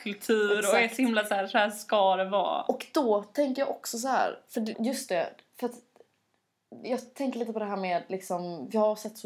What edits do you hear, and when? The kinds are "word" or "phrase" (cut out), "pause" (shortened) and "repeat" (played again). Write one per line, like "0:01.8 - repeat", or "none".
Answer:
0:04.7 - phrase